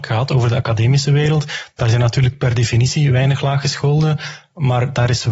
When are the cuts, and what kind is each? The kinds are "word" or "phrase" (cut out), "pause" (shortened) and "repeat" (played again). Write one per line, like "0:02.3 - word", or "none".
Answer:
none